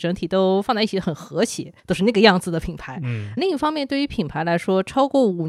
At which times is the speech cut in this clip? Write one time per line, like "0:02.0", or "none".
0:01.8
0:03.4